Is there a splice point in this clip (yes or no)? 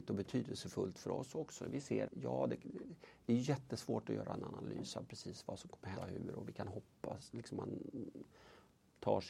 yes